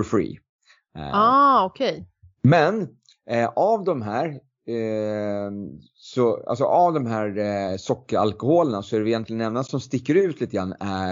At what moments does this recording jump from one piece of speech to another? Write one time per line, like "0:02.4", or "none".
none

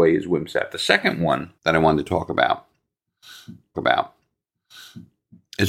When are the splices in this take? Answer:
0:01.6
0:03.7

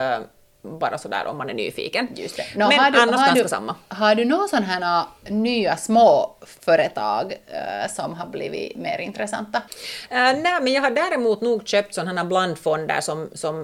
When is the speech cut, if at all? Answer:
0:09.7

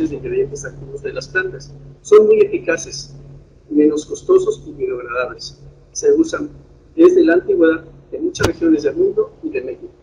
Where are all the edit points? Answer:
none

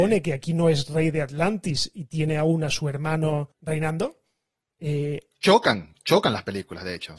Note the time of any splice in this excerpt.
0:03.5

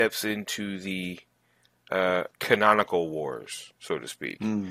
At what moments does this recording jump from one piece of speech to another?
0:02.3
0:03.8

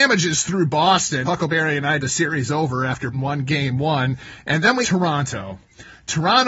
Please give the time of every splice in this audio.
0:01.2
0:02.0
0:03.1
0:04.8

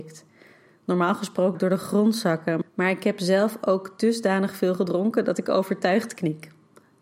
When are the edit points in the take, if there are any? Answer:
0:01.5

